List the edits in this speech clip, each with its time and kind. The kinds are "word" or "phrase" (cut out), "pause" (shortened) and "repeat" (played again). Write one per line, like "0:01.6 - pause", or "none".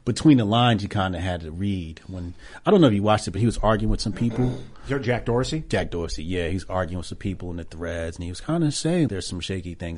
0:09.1 - word